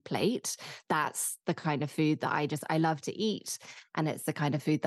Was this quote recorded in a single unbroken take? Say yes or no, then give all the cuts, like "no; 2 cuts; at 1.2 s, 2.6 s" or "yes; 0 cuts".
yes; 0 cuts